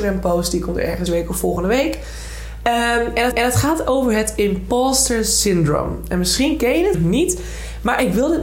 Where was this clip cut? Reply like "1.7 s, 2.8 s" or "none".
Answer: 1.1 s, 3.3 s, 6.9 s